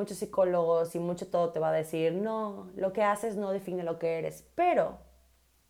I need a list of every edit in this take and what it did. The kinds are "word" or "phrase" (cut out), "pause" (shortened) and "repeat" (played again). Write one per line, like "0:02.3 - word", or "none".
none